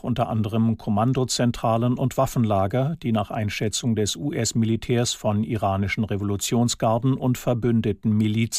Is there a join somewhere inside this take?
no; 0 cuts

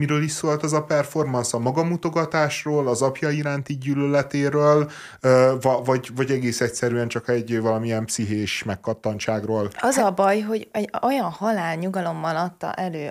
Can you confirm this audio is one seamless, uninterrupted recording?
yes; 0 cuts

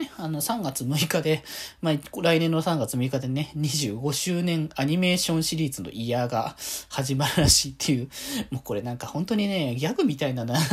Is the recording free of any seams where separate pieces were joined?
yes; 0 cuts

